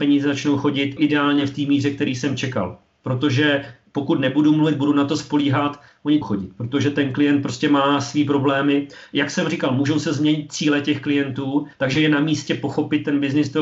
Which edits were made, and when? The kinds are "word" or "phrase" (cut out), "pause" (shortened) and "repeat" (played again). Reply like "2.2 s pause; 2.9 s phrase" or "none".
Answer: 1.0 s word; 6.2 s phrase; 11.7 s pause